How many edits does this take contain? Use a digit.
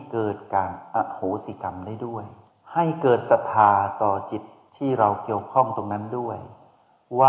1